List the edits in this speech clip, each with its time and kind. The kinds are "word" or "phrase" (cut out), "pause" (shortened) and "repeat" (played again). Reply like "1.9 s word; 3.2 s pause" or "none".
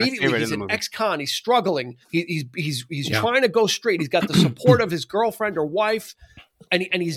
2.0 s pause